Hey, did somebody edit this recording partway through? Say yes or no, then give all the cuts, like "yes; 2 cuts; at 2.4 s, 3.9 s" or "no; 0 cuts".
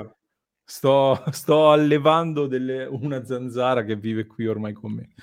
no; 0 cuts